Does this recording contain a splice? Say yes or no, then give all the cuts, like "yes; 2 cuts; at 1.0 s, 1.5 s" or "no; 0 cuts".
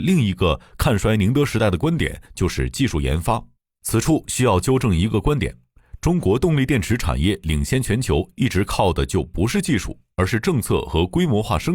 yes; 1 cut; at 3.6 s